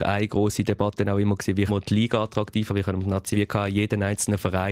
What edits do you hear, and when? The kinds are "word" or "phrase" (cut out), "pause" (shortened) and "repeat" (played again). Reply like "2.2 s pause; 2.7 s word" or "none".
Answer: 1.7 s word; 2.7 s word; 3.3 s phrase